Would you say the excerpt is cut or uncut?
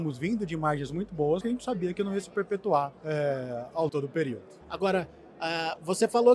cut